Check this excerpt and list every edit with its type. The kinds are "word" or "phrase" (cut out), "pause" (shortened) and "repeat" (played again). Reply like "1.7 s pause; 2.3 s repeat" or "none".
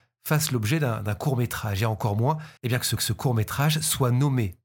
2.6 s pause; 3.0 s repeat